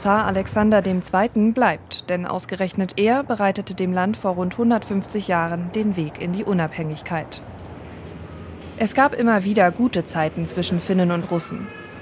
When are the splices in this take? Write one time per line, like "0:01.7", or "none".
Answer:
none